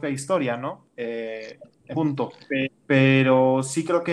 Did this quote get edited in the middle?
yes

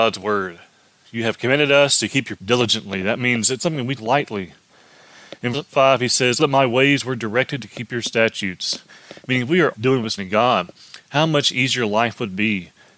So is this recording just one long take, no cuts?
no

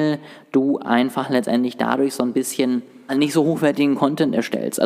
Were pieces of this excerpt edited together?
yes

